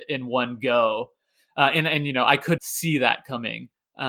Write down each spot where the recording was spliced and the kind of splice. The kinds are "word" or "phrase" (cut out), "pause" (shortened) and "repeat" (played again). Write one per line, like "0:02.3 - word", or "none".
0:02.6 - word